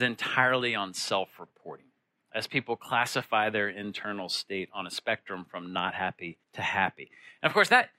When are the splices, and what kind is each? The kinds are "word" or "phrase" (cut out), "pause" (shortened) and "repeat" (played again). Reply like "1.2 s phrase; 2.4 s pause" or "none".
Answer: 6.4 s pause